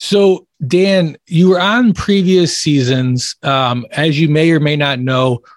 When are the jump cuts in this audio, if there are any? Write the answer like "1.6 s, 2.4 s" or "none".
none